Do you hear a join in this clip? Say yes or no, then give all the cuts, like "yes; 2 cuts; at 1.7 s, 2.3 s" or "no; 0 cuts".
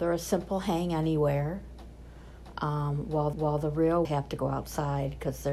yes; 2 cuts; at 3.3 s, 4.0 s